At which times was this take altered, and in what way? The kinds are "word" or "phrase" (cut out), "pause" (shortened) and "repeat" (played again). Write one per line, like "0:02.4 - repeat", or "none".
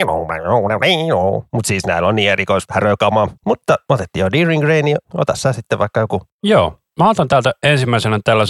0:03.4 - pause